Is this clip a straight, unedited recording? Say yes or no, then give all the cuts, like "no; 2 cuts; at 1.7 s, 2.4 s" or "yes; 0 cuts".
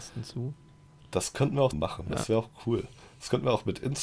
no; 1 cut; at 1.7 s